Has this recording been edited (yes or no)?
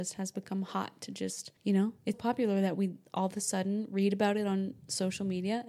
yes